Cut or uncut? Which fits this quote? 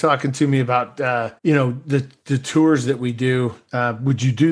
cut